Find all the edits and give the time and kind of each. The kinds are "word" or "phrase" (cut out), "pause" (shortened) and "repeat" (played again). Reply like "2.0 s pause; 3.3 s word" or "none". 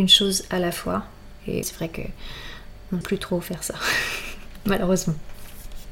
1.6 s word; 3.0 s word